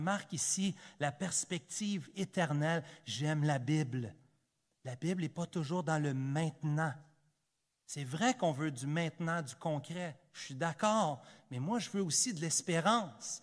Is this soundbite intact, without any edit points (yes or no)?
yes